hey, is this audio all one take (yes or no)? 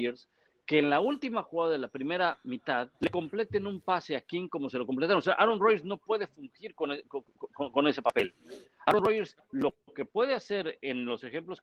no